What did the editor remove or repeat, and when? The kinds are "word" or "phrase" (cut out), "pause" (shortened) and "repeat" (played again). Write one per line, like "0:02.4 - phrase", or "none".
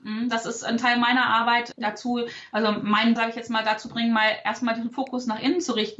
0:01.7 - word
0:03.2 - word
0:03.9 - word

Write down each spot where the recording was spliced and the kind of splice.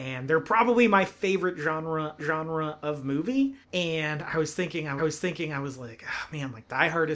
0:02.2 - repeat
0:03.6 - pause
0:05.0 - repeat

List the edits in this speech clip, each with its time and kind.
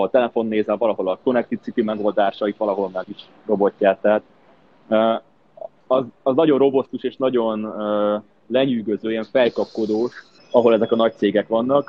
0:03.0 - word
0:05.8 - pause
0:10.4 - pause

